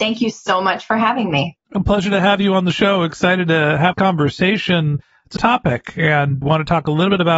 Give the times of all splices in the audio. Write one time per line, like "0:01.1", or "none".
0:03.9
0:05.4
0:06.4